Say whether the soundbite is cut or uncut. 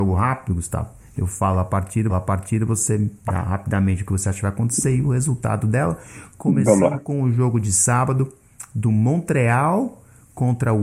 cut